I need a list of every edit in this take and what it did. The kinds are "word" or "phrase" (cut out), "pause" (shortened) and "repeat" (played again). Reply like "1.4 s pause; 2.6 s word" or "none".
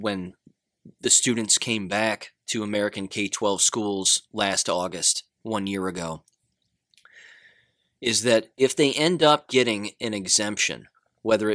none